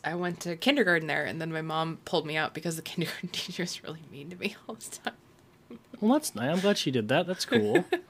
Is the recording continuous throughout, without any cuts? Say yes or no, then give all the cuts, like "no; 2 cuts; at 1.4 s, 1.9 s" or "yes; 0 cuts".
yes; 0 cuts